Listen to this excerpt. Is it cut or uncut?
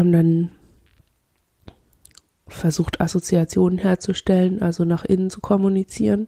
uncut